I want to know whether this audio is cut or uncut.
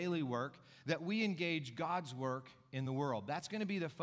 uncut